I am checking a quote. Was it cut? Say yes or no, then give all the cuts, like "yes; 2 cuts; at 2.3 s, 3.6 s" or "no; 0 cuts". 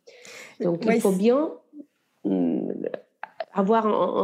no; 0 cuts